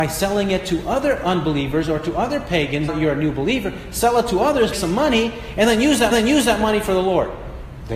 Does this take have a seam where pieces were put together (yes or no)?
yes